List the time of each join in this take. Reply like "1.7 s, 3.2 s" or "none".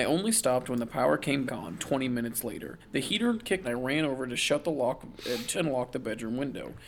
1.5 s, 1.8 s, 2.8 s, 3.6 s, 5.5 s